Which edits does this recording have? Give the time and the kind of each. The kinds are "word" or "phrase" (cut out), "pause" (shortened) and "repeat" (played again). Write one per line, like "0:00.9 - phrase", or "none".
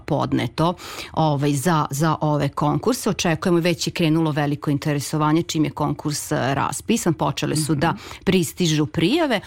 none

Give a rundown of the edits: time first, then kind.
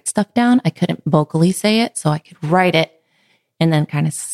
none

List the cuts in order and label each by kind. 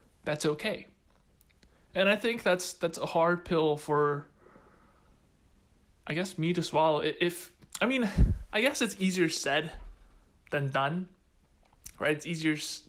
none

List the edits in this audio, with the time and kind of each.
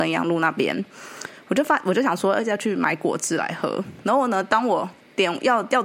none

